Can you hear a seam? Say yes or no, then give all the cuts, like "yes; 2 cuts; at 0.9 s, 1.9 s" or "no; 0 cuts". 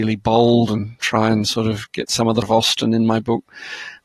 yes; 1 cut; at 2.4 s